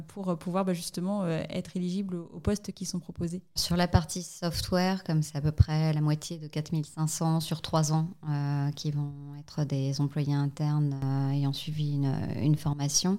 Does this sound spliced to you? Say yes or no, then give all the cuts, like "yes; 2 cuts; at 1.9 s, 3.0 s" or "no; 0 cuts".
yes; 1 cut; at 3.6 s